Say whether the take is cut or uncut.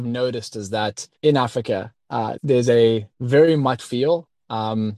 cut